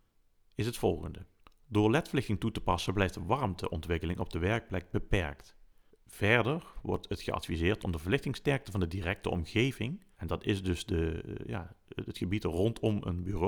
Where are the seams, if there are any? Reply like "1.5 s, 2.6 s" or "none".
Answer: 1.4 s, 5.9 s, 10.1 s